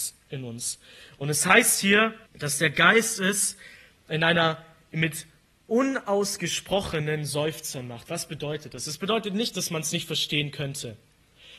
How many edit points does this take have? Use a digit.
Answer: 1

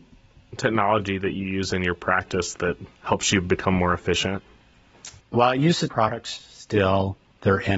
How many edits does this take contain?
3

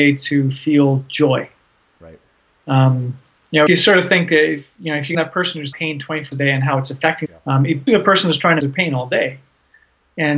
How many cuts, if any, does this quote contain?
7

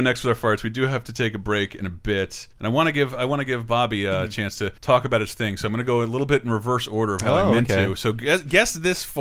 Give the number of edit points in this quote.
2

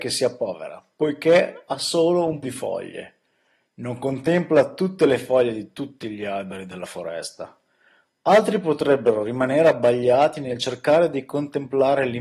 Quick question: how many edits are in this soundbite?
1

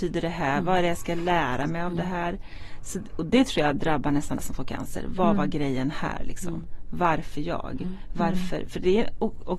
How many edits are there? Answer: 1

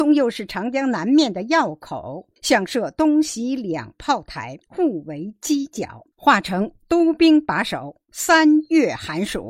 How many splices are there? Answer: 3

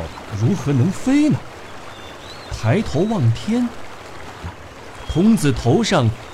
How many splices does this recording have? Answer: 1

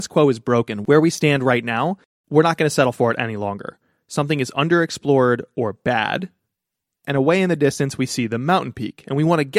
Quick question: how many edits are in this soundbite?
1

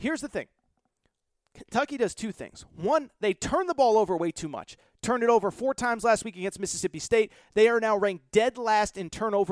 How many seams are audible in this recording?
0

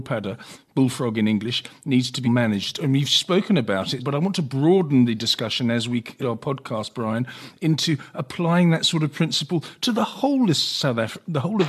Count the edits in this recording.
3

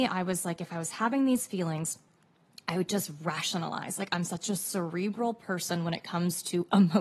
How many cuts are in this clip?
0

